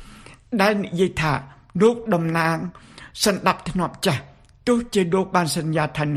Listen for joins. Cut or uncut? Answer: uncut